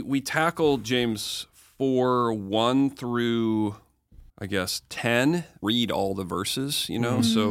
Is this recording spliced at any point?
yes; 2 cuts; at 4.3 s, 5.6 s

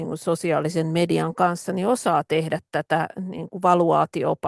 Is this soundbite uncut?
yes; 0 cuts

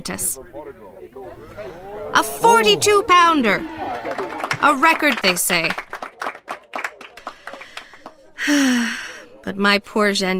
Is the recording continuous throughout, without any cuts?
no; 1 cut; at 5.2 s

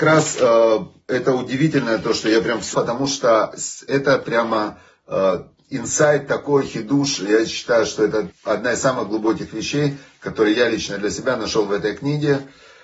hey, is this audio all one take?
no; 2 cuts; at 2.7 s, 8.3 s

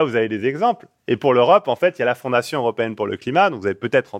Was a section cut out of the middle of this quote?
no; 0 cuts

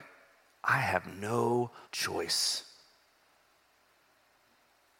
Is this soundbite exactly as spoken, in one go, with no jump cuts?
no; 1 cut; at 1.8 s

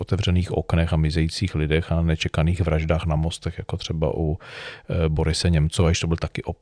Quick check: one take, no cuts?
yes; 0 cuts

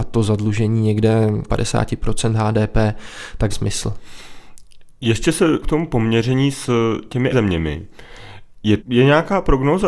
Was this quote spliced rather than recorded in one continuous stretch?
yes; 5 cuts; at 1.5 s, 3.5 s, 5.6 s, 7.3 s, 8.8 s

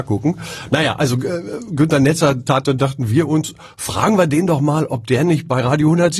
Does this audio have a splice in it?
yes; 1 cut; at 2.6 s

